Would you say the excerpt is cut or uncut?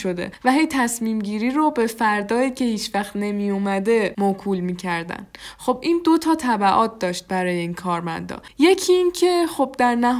uncut